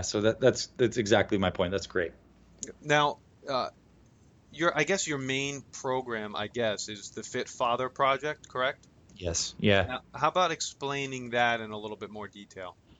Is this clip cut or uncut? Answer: uncut